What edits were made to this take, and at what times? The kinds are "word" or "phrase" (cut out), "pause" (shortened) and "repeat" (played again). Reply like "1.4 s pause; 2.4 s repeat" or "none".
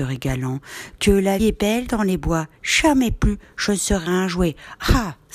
1.4 s word